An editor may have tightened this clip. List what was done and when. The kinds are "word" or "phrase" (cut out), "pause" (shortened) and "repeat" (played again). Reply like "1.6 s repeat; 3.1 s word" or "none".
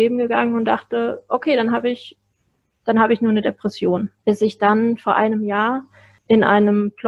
4.2 s pause